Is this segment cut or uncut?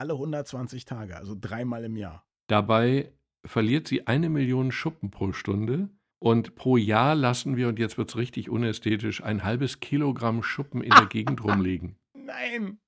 uncut